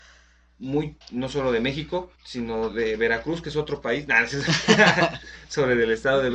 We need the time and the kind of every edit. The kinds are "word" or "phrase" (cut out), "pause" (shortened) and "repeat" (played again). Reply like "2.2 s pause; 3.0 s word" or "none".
1.0 s word; 2.2 s pause